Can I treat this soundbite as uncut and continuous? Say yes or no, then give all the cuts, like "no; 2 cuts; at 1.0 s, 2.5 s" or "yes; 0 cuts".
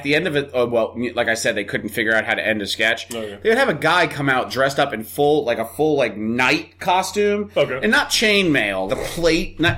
no; 1 cut; at 8.9 s